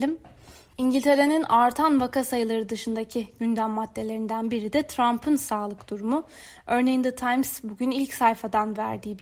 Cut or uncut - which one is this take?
uncut